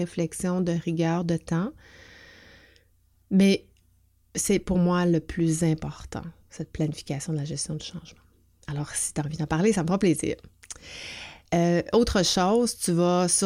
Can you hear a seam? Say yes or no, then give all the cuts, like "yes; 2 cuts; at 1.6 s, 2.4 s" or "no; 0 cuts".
no; 0 cuts